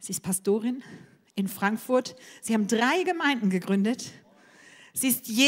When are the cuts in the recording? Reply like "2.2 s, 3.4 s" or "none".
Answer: none